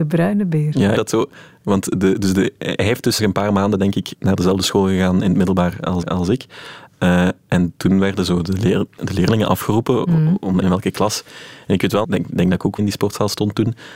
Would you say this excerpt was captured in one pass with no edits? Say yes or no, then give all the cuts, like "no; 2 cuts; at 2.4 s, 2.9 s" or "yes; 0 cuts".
no; 8 cuts; at 1.0 s, 3.2 s, 4.1 s, 6.0 s, 8.9 s, 10.6 s, 12.0 s, 12.8 s